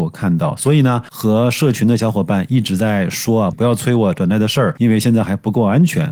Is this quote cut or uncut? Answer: cut